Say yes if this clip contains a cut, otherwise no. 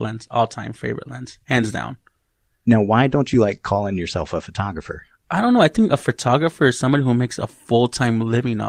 no